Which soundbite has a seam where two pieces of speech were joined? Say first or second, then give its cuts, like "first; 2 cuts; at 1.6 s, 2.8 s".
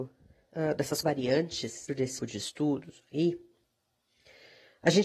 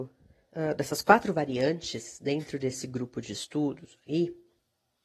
first; 3 cuts; at 1.0 s, 1.9 s, 2.2 s